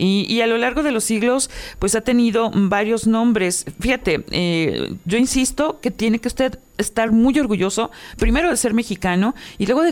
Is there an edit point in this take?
no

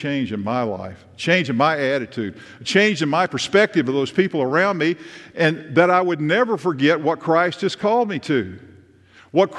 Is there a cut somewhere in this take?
no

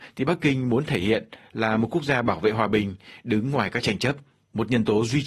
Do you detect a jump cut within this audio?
no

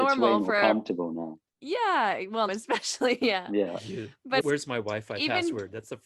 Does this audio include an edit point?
yes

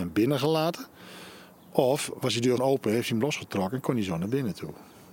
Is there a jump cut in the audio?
yes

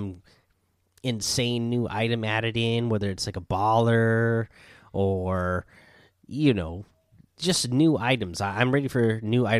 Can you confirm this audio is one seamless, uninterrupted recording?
yes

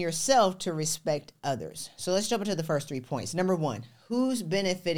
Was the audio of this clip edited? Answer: no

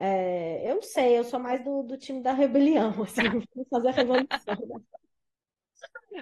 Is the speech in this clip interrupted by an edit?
no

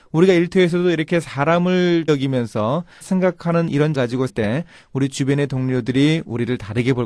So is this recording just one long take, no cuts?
no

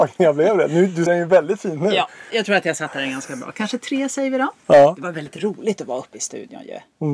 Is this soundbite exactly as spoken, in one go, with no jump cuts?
no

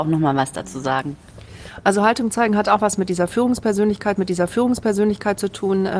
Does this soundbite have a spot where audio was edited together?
yes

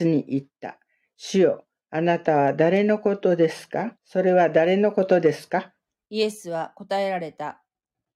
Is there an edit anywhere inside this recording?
yes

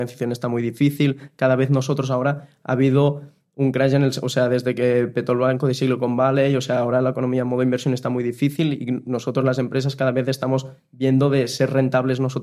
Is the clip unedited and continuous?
yes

